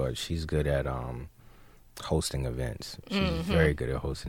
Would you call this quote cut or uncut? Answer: uncut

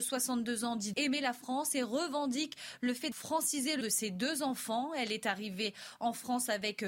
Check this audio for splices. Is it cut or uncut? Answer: cut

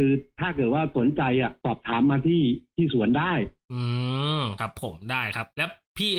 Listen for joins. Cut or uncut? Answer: uncut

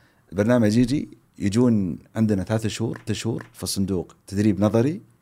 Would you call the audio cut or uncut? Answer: cut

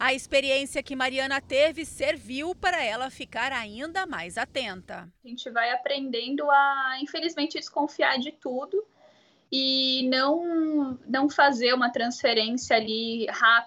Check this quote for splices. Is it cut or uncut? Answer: uncut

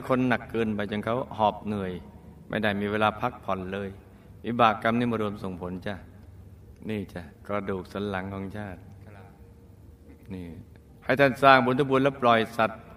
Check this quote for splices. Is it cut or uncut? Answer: cut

